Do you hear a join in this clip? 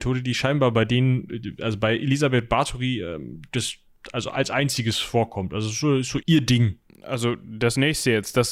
yes; 1 cut; at 6.2 s

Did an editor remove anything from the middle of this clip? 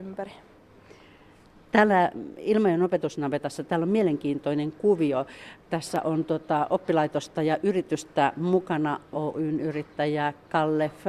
yes; 1 cut; at 9.1 s

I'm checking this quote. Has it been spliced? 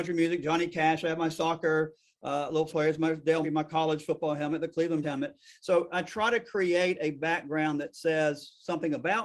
yes; 3 cuts; at 2.7 s, 3.4 s, 5.0 s

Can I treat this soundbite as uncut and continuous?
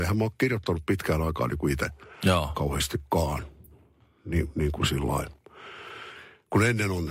yes; 0 cuts

